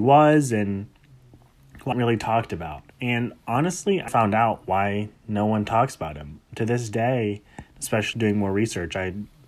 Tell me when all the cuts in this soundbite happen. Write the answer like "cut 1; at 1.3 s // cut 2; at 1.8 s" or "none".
cut 1; at 1.9 s // cut 2; at 2.9 s // cut 3; at 4.1 s // cut 4; at 8.1 s